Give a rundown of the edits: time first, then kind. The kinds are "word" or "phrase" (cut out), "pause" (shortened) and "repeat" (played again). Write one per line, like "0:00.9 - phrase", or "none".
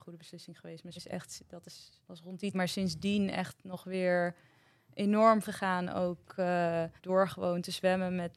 0:01.0 - word
0:02.0 - pause
0:02.5 - word
0:05.4 - word
0:07.0 - pause